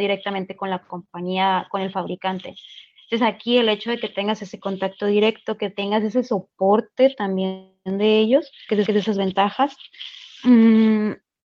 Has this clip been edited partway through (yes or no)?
yes